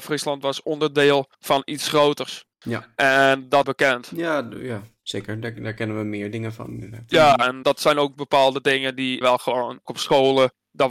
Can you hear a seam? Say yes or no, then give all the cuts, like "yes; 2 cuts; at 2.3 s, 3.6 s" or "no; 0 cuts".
yes; 6 cuts; at 1.3 s, 2.5 s, 3.6 s, 7.6 s, 9.2 s, 9.9 s